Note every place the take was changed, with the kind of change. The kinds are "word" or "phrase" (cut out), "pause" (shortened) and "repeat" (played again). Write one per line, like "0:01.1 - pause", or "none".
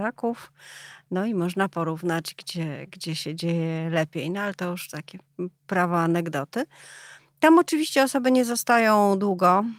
none